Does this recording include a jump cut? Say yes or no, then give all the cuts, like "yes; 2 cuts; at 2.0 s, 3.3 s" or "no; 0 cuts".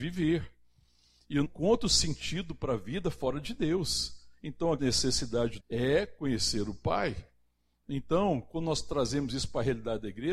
yes; 3 cuts; at 1.4 s, 4.8 s, 5.6 s